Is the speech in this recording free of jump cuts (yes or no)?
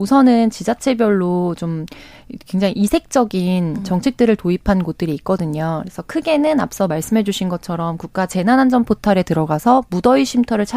yes